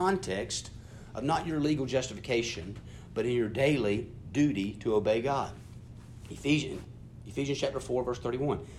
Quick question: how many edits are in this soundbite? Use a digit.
0